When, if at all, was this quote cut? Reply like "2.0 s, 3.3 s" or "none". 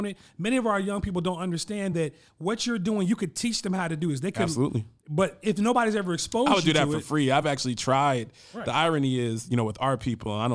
none